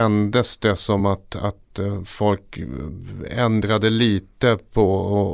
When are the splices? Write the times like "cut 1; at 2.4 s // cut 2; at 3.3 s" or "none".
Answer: none